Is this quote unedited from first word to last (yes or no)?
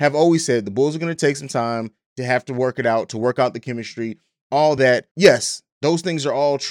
yes